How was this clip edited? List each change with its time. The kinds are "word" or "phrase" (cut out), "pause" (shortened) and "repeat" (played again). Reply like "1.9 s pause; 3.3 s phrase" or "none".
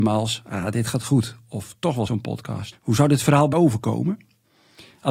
2.1 s word; 2.7 s word; 3.5 s word